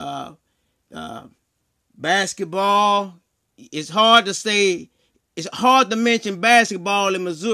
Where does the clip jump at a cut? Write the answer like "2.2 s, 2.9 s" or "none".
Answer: none